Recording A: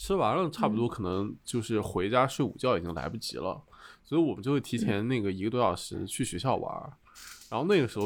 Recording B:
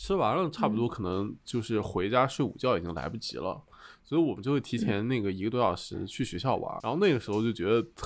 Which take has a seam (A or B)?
B